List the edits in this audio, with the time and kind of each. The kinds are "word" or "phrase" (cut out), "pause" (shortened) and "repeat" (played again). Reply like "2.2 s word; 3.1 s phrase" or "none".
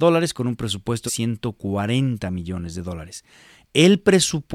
1.1 s word